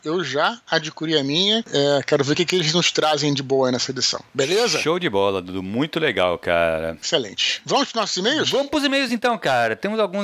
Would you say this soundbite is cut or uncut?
uncut